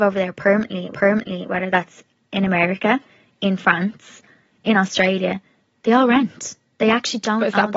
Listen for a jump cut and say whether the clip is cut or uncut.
cut